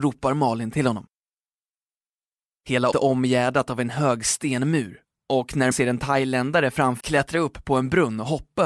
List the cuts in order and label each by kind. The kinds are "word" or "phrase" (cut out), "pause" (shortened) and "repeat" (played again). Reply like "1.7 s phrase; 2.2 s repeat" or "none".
2.9 s word; 5.7 s word; 7.0 s word